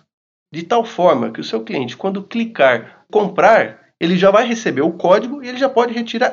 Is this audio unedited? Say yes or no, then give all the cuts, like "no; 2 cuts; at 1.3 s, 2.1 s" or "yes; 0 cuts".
yes; 0 cuts